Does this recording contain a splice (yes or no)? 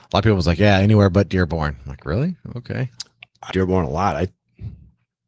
yes